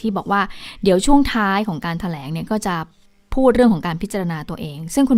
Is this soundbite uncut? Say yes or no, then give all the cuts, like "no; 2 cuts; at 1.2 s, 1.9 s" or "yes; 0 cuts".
yes; 0 cuts